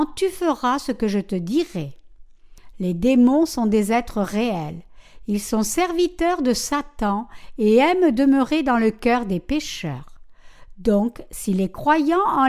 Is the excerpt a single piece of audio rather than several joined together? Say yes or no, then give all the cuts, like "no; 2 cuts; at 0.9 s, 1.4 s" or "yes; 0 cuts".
yes; 0 cuts